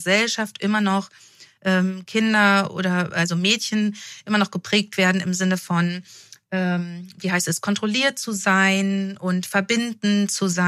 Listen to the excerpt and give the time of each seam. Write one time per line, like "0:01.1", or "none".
none